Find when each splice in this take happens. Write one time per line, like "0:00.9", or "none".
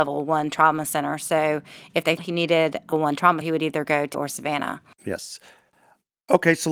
0:02.2
0:02.9
0:03.4
0:04.1